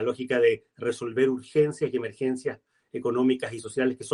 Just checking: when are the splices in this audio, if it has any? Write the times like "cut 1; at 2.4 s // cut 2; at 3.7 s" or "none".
none